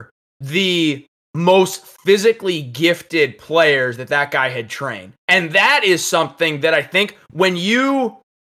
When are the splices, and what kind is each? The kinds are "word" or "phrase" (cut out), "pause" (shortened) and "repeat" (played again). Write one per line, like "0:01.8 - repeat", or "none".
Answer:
0:05.2 - pause